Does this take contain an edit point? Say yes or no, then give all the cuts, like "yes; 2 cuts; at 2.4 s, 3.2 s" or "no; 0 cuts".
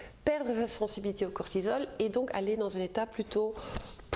no; 0 cuts